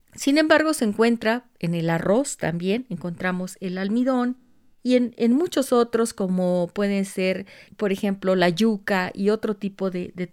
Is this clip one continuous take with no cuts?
yes; 0 cuts

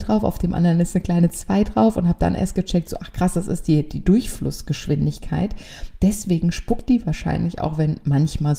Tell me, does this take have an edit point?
no; 0 cuts

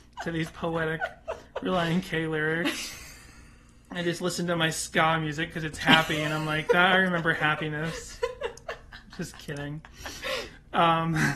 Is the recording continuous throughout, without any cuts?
yes; 0 cuts

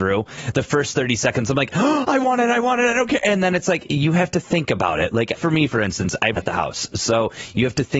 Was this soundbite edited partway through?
yes; 2 cuts; at 5.3 s, 6.4 s

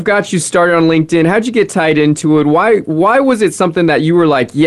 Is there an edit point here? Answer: no; 0 cuts

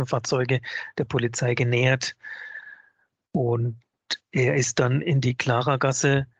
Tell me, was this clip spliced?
no; 0 cuts

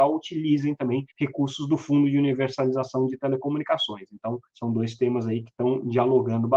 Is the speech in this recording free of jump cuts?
no; 2 cuts; at 1.1 s, 4.5 s

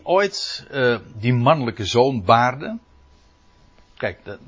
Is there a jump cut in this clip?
no; 0 cuts

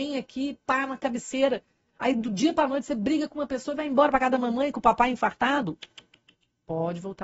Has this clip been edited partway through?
no; 0 cuts

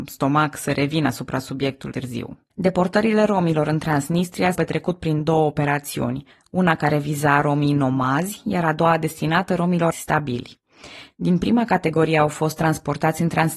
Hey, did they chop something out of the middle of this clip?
yes; 5 cuts; at 1.9 s, 2.5 s, 4.5 s, 6.3 s, 9.9 s

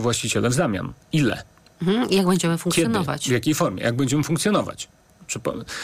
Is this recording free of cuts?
yes; 0 cuts

